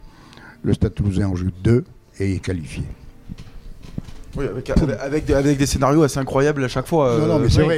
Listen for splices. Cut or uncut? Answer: uncut